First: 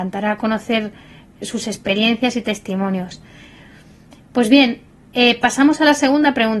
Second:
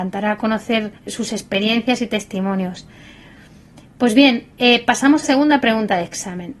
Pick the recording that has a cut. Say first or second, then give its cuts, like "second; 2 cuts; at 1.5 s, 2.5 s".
second; 3 cuts; at 1.0 s, 4.5 s, 5.2 s